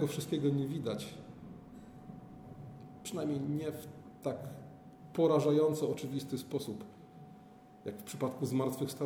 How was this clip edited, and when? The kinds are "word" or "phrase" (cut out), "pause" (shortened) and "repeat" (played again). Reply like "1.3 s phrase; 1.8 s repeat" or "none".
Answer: none